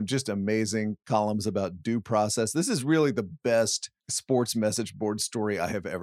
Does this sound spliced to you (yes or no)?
yes